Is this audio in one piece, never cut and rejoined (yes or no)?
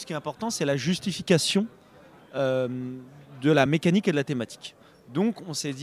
yes